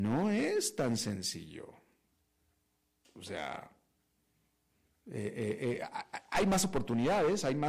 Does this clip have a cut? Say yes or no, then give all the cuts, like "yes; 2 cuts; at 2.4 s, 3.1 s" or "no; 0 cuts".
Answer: no; 0 cuts